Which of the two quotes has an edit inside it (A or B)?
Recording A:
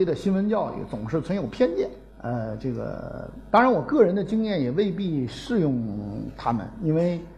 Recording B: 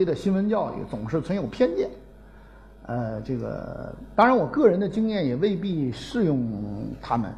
A